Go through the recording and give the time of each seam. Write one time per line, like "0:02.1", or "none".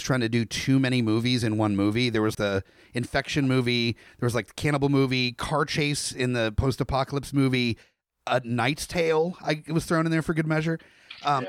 0:02.3

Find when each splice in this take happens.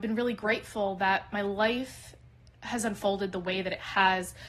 none

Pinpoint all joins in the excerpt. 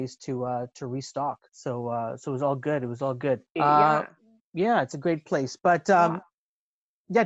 0:01.5
0:03.5

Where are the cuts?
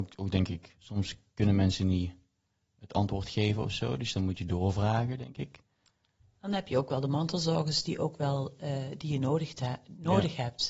none

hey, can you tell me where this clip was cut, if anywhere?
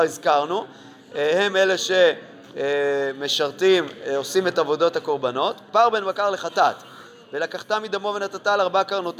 none

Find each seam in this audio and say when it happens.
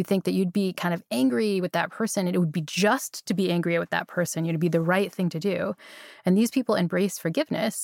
none

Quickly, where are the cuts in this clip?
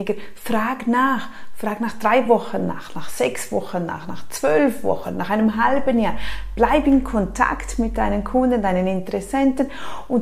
none

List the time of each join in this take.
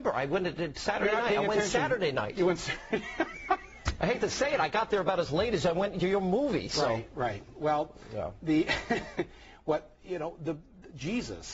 none

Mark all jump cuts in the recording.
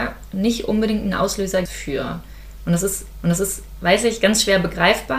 0:01.7
0:03.2

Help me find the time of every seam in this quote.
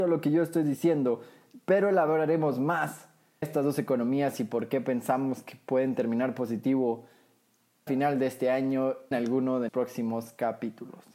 0:03.4
0:07.9
0:09.1
0:09.7

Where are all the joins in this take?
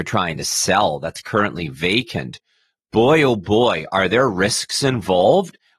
none

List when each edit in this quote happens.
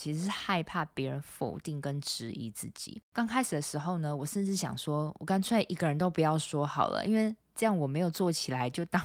0:03.0

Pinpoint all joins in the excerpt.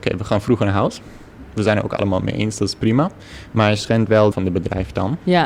0:04.3

